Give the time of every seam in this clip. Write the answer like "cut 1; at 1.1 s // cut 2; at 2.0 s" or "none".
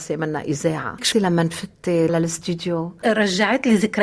cut 1; at 1.1 s // cut 2; at 2.1 s